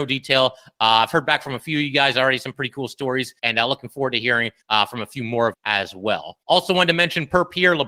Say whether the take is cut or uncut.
cut